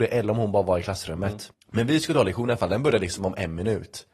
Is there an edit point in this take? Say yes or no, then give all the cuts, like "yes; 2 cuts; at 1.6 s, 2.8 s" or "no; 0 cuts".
yes; 1 cut; at 1.5 s